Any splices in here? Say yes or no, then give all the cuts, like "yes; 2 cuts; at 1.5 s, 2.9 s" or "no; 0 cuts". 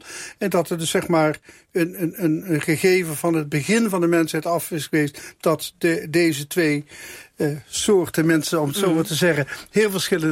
no; 0 cuts